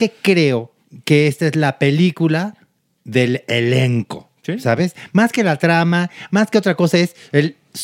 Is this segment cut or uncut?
uncut